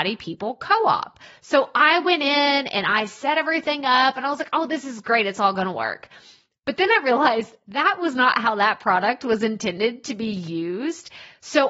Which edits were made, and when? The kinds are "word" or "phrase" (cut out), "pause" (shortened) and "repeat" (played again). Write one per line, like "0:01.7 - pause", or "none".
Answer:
none